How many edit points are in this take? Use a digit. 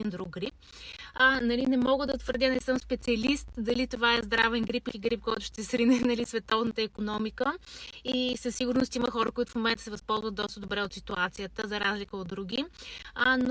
1